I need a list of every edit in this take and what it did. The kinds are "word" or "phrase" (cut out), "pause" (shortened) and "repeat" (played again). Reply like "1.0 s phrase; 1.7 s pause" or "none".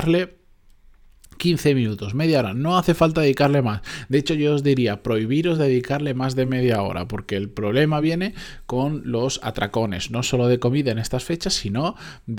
none